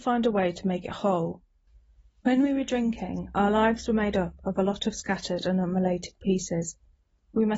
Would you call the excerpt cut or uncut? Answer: uncut